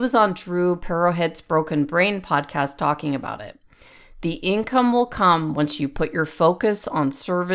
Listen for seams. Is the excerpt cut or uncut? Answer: uncut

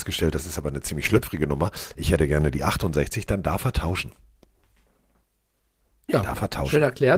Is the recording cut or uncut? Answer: uncut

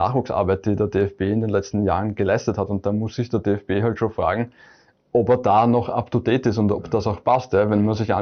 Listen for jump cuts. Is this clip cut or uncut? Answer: uncut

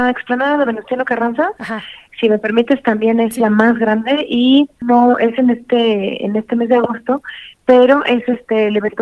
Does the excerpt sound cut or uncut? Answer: uncut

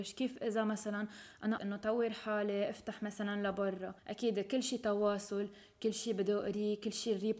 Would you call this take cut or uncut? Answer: cut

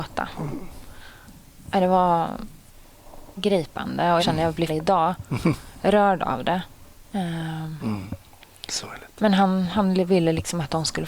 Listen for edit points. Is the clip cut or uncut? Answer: cut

